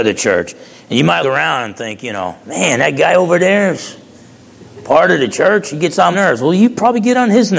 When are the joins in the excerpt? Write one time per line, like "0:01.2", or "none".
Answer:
0:01.2
0:02.4
0:06.1